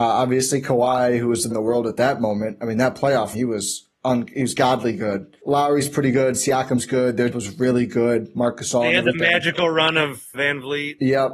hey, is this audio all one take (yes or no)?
no